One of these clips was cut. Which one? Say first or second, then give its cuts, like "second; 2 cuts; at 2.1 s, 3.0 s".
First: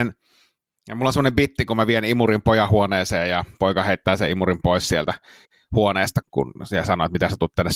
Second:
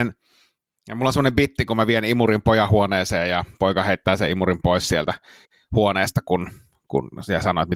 first; 1 cut; at 6.2 s